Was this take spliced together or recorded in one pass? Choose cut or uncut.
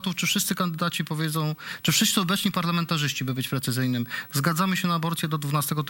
uncut